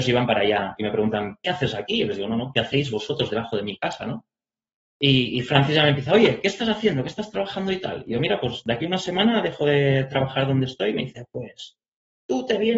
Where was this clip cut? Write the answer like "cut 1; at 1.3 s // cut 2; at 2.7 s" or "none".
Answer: none